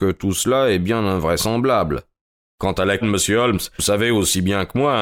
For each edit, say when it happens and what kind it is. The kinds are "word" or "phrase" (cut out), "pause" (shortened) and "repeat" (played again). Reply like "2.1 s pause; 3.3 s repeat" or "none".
3.0 s word; 3.8 s word